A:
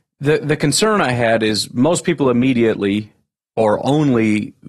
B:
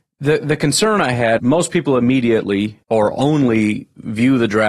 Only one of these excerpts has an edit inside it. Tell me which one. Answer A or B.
B